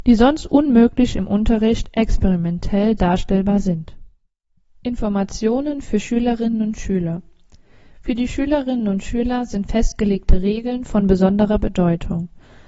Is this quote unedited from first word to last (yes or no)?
yes